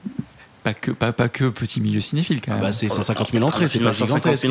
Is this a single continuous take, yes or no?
yes